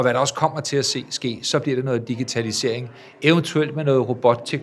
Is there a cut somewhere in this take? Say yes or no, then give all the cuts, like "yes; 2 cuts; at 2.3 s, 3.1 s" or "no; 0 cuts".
no; 0 cuts